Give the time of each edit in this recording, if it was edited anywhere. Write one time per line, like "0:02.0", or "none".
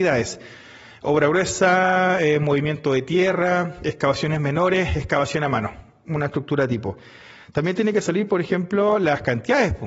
none